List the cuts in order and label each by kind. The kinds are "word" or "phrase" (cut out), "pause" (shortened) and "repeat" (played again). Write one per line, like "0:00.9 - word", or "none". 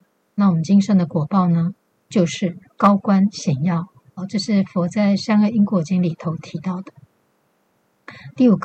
none